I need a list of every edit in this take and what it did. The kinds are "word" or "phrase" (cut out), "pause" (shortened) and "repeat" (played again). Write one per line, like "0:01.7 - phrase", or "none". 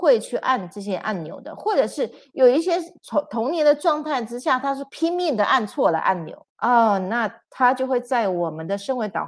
0:06.5 - pause